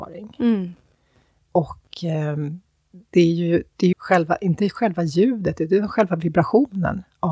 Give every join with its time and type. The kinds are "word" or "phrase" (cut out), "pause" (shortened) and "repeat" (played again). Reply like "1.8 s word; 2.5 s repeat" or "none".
3.9 s word